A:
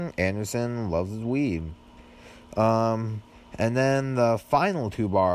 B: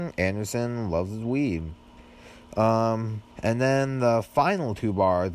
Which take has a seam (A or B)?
B